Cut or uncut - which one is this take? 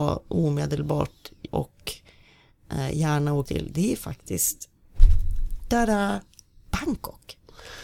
cut